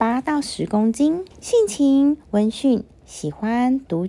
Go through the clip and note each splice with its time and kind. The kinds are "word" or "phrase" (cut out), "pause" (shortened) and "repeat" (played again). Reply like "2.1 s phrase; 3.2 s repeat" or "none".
1.3 s pause